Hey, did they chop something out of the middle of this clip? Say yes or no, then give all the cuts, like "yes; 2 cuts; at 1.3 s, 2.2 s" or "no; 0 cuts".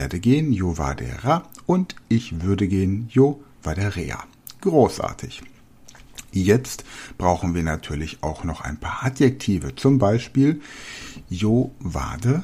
no; 0 cuts